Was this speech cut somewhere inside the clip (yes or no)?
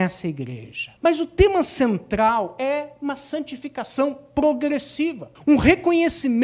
yes